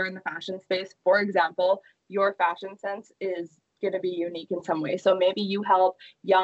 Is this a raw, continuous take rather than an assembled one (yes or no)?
yes